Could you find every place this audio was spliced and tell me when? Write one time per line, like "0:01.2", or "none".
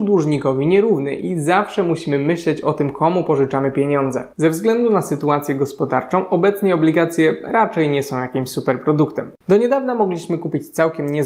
0:04.3
0:09.4